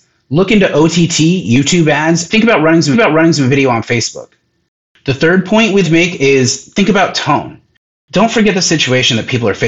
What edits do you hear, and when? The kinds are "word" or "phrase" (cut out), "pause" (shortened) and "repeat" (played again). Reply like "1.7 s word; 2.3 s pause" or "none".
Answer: 2.3 s word; 2.9 s repeat; 5.8 s word